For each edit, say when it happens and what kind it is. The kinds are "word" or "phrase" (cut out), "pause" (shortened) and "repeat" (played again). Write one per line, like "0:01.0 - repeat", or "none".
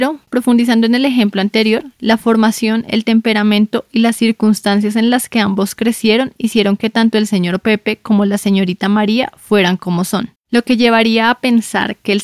0:10.4 - pause